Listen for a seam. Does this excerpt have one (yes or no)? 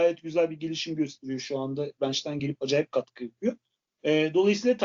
no